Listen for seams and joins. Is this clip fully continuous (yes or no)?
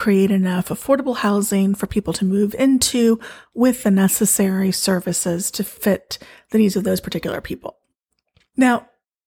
yes